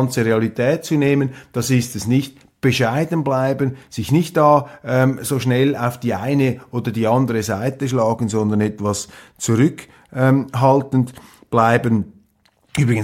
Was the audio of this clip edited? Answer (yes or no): no